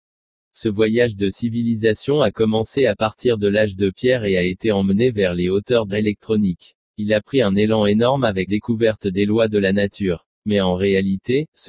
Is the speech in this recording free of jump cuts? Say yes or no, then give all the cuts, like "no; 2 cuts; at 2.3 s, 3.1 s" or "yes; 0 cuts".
no; 4 cuts; at 5.9 s, 6.9 s, 8.5 s, 10.3 s